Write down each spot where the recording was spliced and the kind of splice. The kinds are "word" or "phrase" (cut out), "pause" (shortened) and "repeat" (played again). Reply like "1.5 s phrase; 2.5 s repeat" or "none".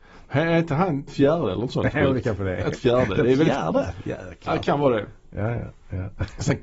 1.1 s word; 2.8 s phrase

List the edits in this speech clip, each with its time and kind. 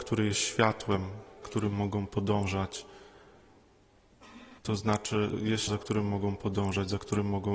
1.4 s word; 4.6 s pause; 5.3 s word; 5.7 s word

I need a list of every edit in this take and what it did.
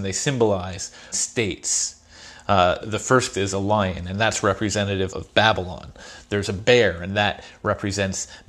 1.1 s phrase; 2.8 s word; 3.3 s word; 5.1 s word

